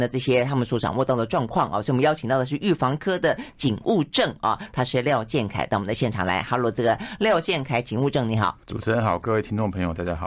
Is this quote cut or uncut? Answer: cut